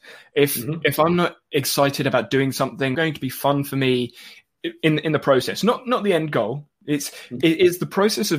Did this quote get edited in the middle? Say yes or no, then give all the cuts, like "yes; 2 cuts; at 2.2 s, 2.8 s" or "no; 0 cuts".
yes; 1 cut; at 2.9 s